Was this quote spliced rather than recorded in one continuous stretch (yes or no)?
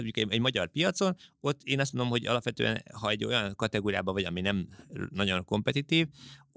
no